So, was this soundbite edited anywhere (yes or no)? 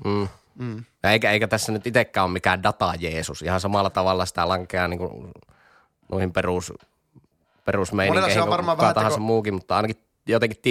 no